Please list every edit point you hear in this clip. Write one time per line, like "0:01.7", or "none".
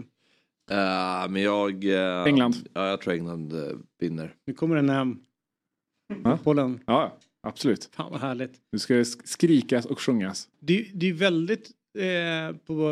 0:10.5